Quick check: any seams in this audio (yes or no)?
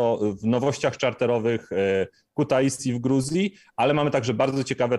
no